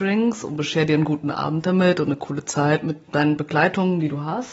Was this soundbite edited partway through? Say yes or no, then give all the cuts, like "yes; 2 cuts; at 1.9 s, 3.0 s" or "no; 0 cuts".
yes; 1 cut; at 3.0 s